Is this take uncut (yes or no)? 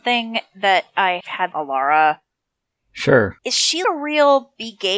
no